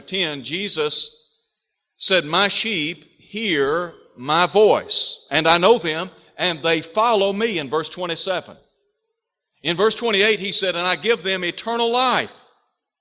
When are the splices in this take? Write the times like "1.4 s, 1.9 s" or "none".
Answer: none